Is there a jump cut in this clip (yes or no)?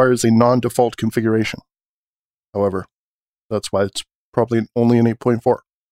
no